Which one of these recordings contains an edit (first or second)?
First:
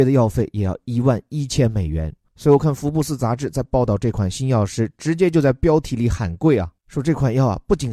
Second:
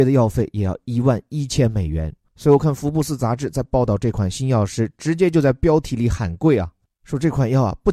first